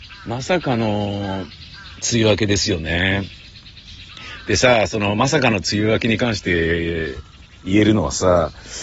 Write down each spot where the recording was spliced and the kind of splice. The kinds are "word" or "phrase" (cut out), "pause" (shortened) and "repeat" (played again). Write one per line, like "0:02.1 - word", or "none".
none